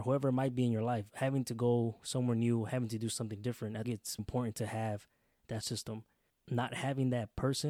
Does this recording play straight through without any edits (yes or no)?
no